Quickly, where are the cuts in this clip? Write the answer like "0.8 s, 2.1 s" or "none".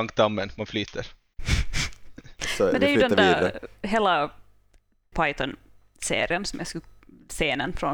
5.1 s